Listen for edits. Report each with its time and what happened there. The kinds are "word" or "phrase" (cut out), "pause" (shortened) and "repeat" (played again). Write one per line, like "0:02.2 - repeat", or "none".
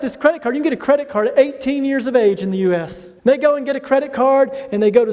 0:03.2 - pause